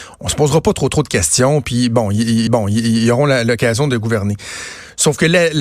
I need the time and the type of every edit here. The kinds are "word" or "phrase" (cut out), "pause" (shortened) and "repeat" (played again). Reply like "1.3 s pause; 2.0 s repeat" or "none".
2.5 s repeat